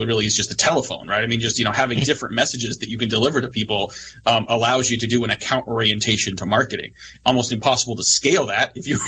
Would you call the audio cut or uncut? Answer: uncut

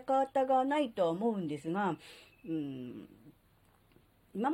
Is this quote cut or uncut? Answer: uncut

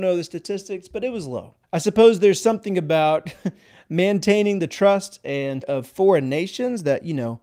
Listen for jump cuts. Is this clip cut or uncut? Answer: cut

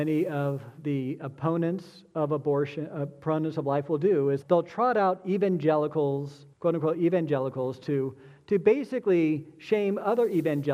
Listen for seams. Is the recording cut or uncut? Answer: cut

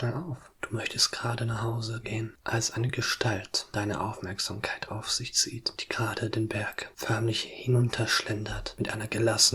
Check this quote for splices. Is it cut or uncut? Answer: uncut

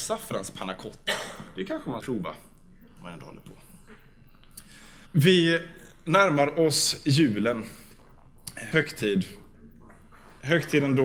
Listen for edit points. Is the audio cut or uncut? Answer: cut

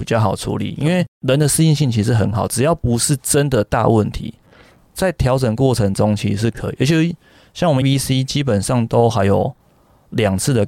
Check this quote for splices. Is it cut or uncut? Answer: cut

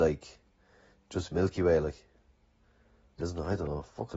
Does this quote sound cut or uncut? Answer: cut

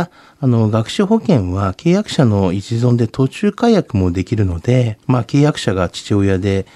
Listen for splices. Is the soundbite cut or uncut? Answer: cut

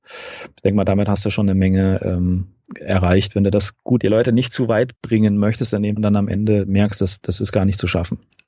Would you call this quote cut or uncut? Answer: cut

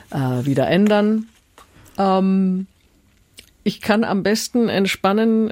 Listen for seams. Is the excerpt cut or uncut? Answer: uncut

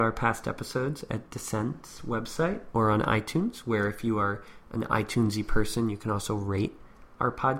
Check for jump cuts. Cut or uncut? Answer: uncut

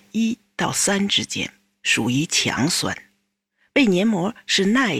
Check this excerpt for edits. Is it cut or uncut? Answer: uncut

